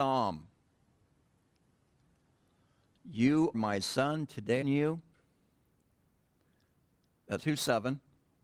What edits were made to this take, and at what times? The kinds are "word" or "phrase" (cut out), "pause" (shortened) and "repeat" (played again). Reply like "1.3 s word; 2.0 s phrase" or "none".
3.5 s word; 4.6 s phrase; 7.4 s word